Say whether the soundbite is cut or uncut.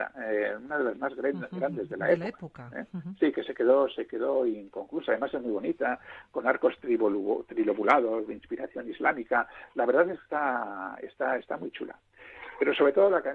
uncut